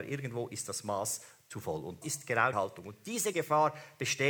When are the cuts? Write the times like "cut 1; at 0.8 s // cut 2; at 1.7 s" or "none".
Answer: cut 1; at 2.0 s // cut 2; at 2.5 s // cut 3; at 3.3 s